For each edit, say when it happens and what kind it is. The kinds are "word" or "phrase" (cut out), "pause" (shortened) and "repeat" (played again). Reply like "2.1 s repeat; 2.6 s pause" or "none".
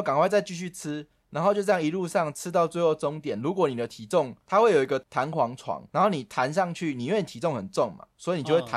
5.9 s pause